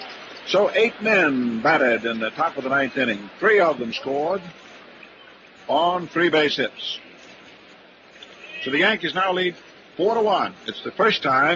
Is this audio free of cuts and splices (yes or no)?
yes